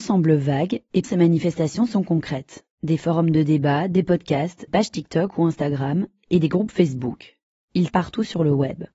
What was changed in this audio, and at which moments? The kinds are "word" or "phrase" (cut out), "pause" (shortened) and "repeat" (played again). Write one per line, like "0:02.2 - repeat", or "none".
0:01.0 - word
0:04.7 - word
0:07.9 - word